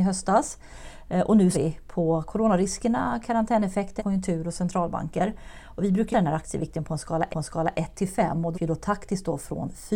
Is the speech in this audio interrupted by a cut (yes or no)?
yes